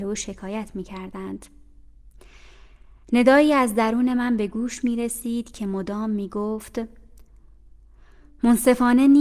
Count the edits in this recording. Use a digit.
0